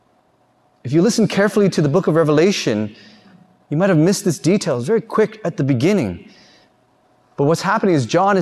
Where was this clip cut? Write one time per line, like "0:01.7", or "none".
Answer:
none

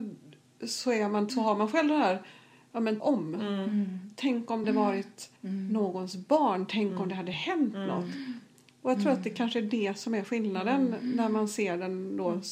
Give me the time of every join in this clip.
0:01.3
0:03.0
0:04.6
0:05.4

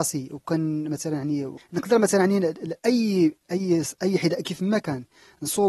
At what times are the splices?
none

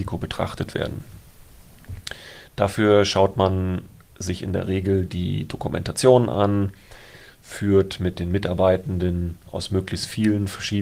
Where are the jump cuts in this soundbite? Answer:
none

